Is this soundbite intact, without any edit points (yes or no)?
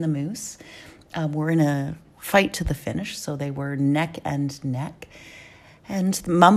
yes